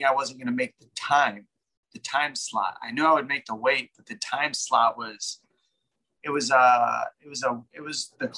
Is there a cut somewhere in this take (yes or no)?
no